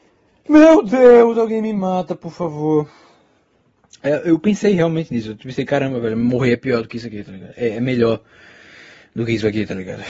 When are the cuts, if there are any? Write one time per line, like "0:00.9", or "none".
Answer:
none